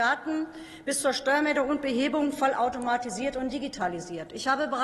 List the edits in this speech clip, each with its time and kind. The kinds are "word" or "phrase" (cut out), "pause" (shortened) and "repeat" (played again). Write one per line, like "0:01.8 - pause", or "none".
none